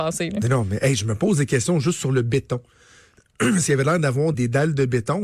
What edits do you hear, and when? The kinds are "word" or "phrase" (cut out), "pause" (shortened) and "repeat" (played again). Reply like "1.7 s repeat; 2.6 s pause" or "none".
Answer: 4.3 s word